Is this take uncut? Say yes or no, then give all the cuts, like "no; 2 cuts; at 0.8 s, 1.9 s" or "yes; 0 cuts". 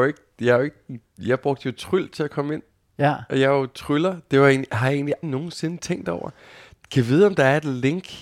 no; 1 cut; at 5.2 s